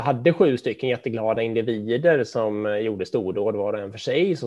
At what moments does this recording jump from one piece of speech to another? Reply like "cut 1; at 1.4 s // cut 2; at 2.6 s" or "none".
none